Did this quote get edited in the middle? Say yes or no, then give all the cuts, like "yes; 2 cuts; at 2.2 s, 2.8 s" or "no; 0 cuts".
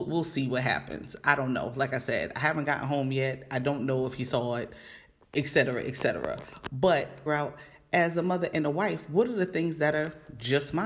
yes; 1 cut; at 7.3 s